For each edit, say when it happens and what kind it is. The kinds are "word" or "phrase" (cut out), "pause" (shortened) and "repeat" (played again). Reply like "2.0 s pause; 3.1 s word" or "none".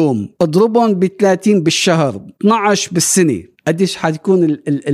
none